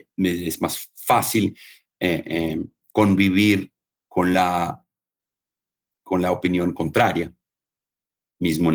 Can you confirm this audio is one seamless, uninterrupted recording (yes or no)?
yes